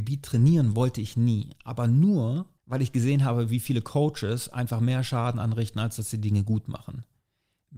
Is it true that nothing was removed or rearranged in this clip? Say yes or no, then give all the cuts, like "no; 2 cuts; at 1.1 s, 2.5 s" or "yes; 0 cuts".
no; 1 cut; at 2.6 s